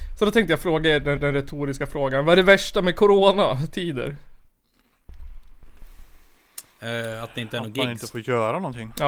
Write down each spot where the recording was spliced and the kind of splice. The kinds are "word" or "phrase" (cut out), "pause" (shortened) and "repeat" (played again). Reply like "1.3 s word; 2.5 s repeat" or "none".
1.2 s repeat; 6.7 s pause